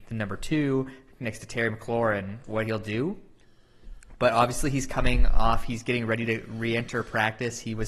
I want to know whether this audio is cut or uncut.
uncut